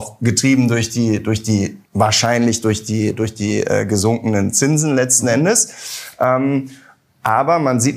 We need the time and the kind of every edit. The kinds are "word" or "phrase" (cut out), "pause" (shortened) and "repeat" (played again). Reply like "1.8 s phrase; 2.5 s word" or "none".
1.9 s pause